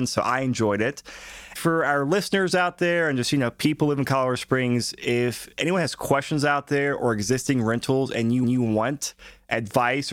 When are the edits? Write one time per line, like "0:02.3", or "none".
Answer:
0:01.6
0:08.4